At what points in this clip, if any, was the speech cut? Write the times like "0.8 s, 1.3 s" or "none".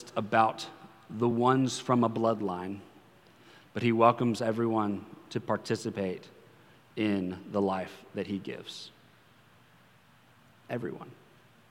none